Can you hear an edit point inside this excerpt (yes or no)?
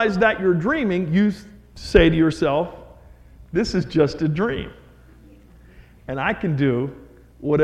no